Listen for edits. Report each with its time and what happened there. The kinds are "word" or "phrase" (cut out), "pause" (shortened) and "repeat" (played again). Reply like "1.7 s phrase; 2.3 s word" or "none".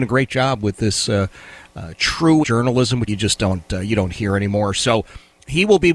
2.4 s word; 3.1 s phrase